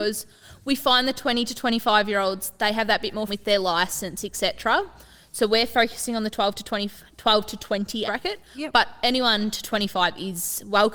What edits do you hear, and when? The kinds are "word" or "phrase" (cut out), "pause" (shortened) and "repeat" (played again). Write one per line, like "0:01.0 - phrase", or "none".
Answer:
0:03.3 - word
0:08.1 - word